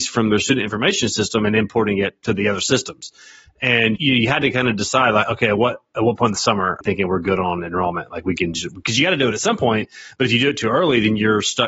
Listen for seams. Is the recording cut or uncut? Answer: cut